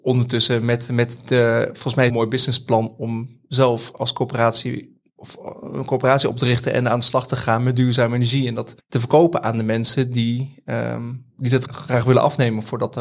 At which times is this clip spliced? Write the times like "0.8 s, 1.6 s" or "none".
2.1 s, 5.1 s, 8.8 s, 11.6 s

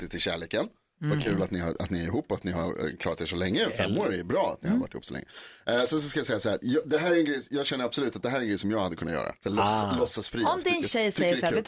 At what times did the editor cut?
9.4 s

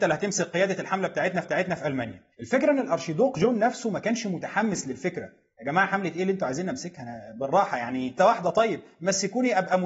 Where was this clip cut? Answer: 1.4 s, 2.3 s, 8.2 s

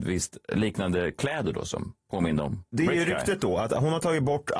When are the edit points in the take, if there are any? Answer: 2.0 s

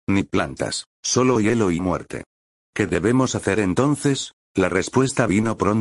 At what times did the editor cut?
0.9 s, 4.4 s

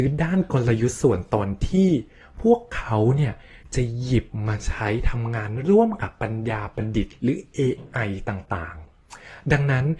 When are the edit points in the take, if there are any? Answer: none

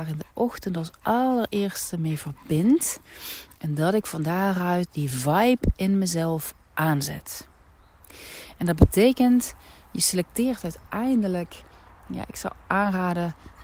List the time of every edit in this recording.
none

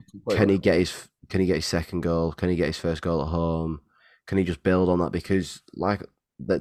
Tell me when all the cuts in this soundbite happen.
none

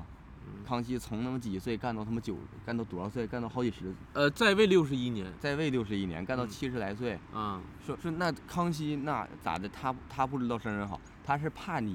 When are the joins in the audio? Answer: 8.0 s

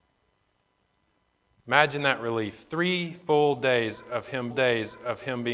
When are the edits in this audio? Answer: 4.5 s

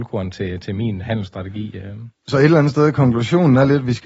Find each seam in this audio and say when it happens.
2.1 s

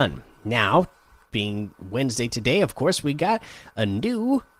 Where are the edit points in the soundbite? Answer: none

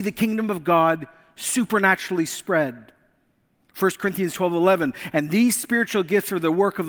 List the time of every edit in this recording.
none

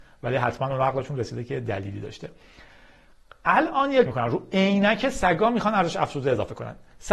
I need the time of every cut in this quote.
4.1 s

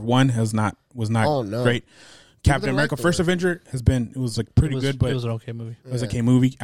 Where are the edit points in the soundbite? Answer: none

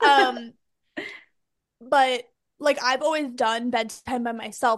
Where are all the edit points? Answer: none

